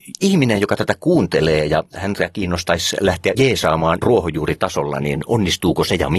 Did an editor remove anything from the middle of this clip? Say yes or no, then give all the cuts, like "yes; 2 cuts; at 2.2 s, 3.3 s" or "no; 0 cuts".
yes; 2 cuts; at 3.3 s, 4.0 s